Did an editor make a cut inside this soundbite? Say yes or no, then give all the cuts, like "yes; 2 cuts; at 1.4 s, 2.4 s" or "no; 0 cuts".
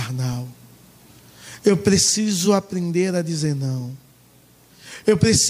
no; 0 cuts